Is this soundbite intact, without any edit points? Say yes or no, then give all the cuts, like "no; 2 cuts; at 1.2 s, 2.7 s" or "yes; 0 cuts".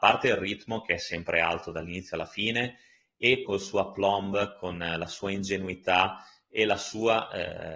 no; 1 cut; at 3.5 s